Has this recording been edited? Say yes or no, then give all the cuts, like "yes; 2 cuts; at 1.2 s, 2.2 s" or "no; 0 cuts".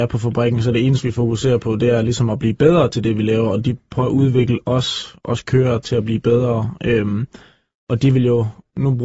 no; 0 cuts